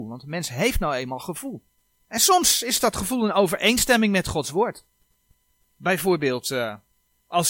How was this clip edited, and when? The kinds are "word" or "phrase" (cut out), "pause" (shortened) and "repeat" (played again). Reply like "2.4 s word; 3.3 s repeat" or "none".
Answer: none